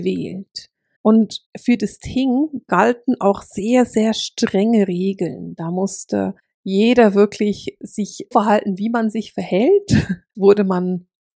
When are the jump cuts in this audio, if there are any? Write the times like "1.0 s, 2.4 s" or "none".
8.3 s, 10.3 s